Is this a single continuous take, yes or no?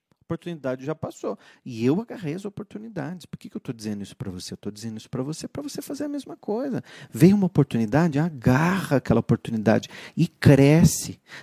yes